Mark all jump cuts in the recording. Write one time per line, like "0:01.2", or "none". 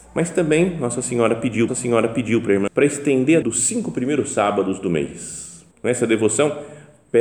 0:01.7
0:02.7
0:03.4
0:05.7